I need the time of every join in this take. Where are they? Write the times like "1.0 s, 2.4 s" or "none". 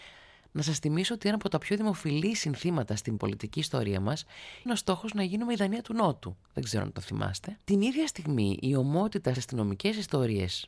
3.2 s, 4.7 s, 6.4 s, 7.6 s, 9.4 s